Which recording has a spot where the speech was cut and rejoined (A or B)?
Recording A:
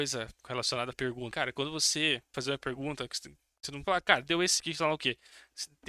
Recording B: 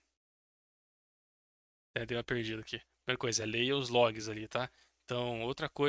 A